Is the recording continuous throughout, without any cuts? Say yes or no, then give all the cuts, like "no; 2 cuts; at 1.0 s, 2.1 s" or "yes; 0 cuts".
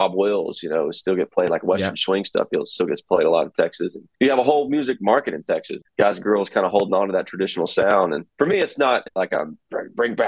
no; 3 cuts; at 4.1 s, 5.9 s, 8.3 s